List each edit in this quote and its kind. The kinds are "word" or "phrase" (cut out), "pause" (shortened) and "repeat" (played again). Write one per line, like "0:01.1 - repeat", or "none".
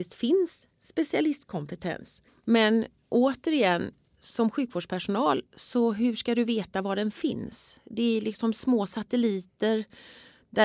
0:02.3 - pause
0:05.5 - pause

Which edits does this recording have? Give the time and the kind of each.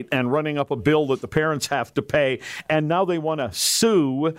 none

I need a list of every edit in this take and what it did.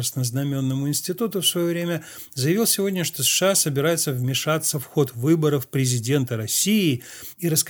none

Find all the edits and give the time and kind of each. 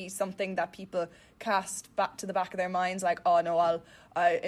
none

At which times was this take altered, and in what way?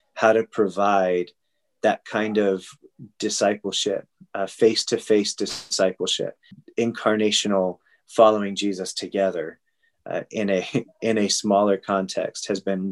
none

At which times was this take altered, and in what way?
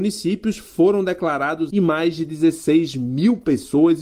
0:01.7 - phrase

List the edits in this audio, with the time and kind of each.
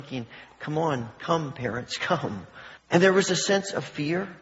0:02.8 - pause

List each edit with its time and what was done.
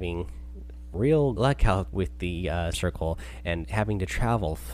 0:00.9 - word
0:01.4 - word
0:01.9 - word
0:02.7 - word
0:03.6 - word

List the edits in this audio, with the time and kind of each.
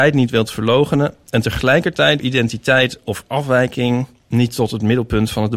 0:02.2 - word

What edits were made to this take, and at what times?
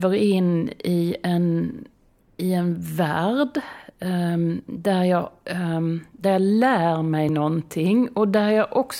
none

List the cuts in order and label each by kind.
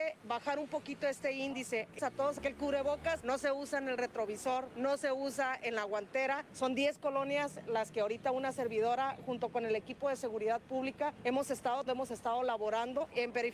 0:02.0 - word
0:11.9 - word

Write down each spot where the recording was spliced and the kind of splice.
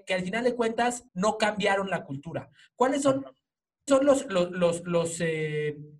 0:01.1 - pause
0:03.9 - word

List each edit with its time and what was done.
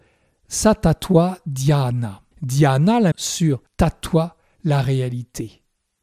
0:02.3 - pause
0:03.1 - word
0:03.7 - pause

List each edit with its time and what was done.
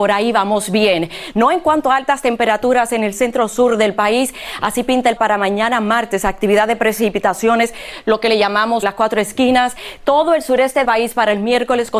0:05.2 - word
0:08.8 - word
0:10.8 - word

